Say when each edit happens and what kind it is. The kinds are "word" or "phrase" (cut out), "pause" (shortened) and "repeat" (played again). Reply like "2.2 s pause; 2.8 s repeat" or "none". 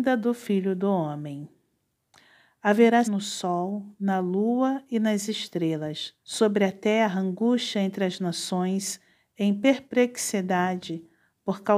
3.0 s word; 6.2 s pause